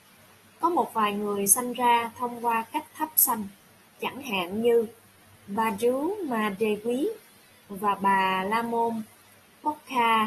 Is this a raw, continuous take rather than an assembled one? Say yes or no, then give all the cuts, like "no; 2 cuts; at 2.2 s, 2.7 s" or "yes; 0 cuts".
yes; 0 cuts